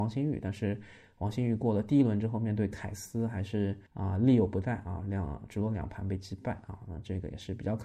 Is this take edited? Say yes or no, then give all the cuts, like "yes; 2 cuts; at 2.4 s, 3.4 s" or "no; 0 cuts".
yes; 1 cut; at 3.9 s